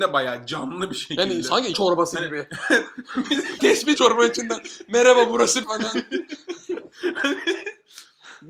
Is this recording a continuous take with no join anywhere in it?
no; 4 cuts; at 1.7 s, 3.6 s, 4.0 s, 5.6 s

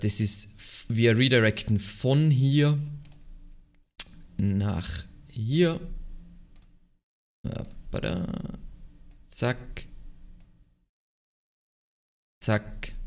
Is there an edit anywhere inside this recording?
no; 0 cuts

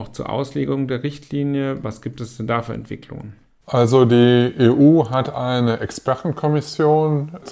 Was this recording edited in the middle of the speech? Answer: no; 0 cuts

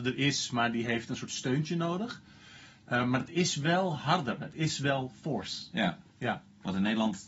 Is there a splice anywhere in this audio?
no; 0 cuts

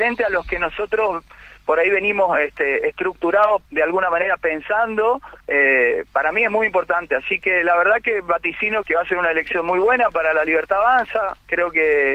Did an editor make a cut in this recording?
yes; 3 cuts; at 3.7 s, 5.4 s, 8.8 s

